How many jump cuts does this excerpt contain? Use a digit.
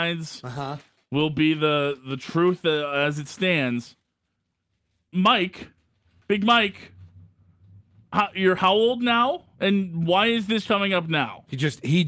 2